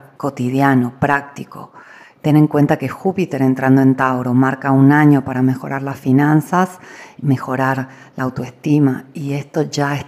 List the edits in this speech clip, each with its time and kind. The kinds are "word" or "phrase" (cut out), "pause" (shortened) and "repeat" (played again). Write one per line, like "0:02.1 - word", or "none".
none